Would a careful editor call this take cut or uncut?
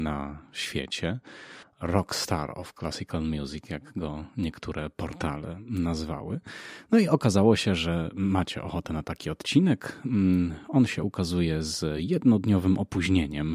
uncut